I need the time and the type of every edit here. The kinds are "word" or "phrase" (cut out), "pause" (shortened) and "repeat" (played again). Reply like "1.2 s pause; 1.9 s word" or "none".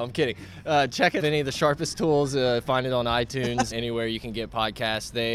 1.2 s word; 3.7 s word